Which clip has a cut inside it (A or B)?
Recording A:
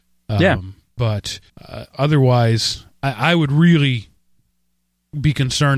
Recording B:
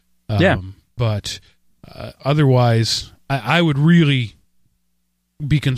A